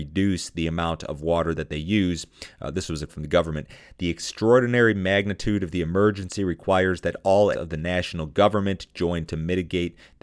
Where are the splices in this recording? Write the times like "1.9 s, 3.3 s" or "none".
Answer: 3.1 s, 7.5 s, 9.3 s